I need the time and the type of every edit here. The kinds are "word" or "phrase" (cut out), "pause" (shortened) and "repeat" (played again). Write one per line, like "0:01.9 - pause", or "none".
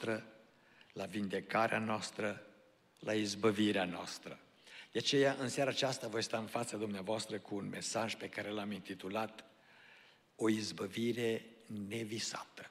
none